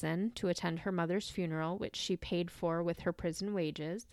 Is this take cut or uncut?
uncut